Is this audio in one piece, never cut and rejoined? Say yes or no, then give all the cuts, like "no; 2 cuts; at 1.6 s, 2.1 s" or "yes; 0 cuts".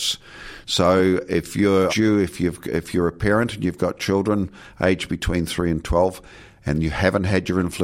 no; 1 cut; at 1.9 s